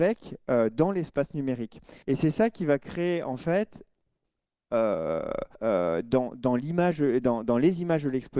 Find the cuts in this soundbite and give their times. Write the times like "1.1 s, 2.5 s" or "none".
2.0 s, 5.5 s